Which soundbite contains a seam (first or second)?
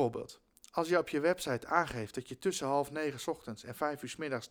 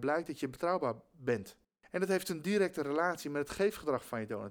second